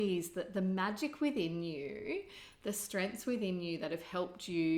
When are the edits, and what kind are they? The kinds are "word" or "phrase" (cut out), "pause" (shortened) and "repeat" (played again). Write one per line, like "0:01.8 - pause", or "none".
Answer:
none